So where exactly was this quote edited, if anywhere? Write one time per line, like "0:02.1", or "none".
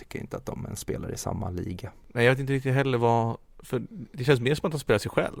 none